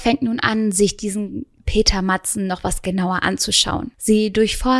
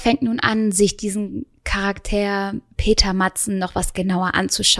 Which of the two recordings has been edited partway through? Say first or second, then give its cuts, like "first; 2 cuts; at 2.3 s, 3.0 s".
first; 1 cut; at 1.6 s